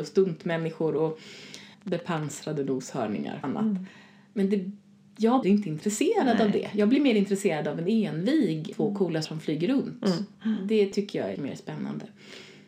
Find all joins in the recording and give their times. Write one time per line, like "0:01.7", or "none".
0:01.7
0:03.4
0:05.4
0:07.0
0:08.7
0:09.2
0:10.3
0:11.3